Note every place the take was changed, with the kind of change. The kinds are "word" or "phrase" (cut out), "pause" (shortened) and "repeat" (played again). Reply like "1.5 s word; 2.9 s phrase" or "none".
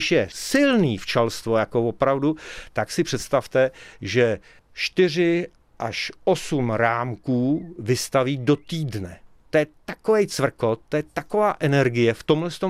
none